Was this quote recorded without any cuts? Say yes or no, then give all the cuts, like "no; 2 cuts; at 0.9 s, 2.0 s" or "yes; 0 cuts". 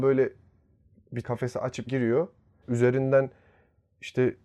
no; 3 cuts; at 1.2 s, 1.9 s, 2.6 s